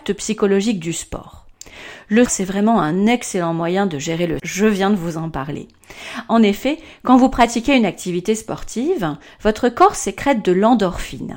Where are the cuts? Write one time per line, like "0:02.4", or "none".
0:02.3
0:04.4